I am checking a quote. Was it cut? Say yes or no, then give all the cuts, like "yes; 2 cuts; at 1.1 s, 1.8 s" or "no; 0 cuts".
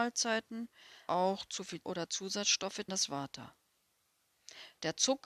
yes; 3 cuts; at 1.1 s, 1.8 s, 2.9 s